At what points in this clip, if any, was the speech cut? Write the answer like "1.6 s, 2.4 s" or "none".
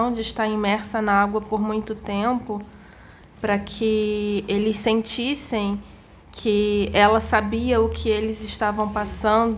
none